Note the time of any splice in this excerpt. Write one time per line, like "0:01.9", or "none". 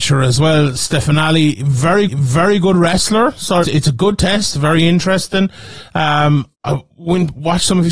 0:02.1
0:03.6
0:06.5